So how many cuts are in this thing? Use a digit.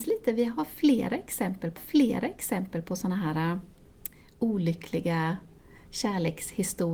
1